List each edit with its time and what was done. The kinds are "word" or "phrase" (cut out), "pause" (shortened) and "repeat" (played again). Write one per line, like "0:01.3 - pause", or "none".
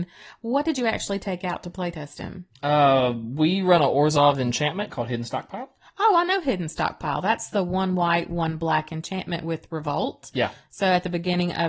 none